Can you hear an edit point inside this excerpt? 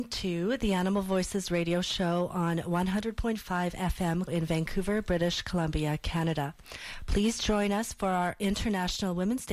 yes; 1 cut; at 4.3 s

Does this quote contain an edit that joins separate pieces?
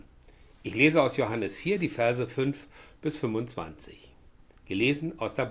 no; 0 cuts

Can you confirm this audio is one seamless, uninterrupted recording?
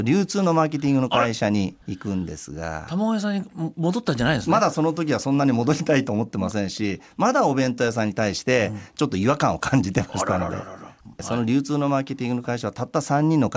no; 1 cut; at 1.8 s

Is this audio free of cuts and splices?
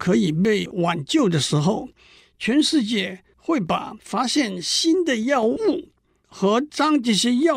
yes; 0 cuts

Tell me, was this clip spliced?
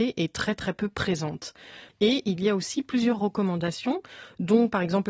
no; 0 cuts

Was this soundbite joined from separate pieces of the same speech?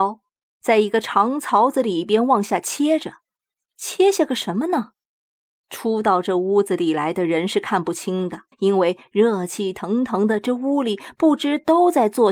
yes; 1 cut; at 8.5 s

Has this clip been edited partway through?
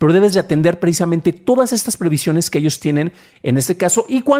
no; 0 cuts

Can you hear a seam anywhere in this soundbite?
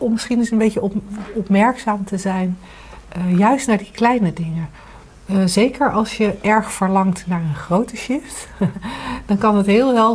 no; 0 cuts

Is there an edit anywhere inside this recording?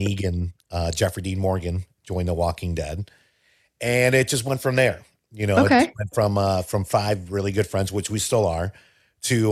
no; 0 cuts

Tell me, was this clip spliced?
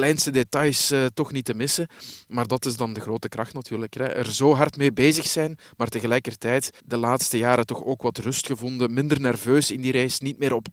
yes; 1 cut; at 6.8 s

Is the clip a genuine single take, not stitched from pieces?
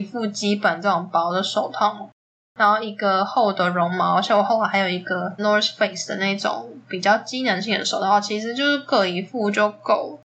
no; 1 cut; at 5.4 s

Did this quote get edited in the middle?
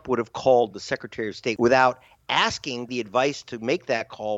yes; 1 cut; at 2.9 s

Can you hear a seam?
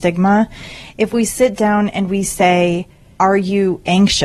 no; 0 cuts

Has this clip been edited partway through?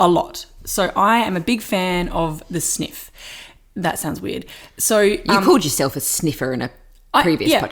no; 0 cuts

